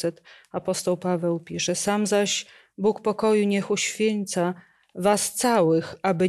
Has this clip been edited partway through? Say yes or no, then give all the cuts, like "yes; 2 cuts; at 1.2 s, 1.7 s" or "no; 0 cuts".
no; 0 cuts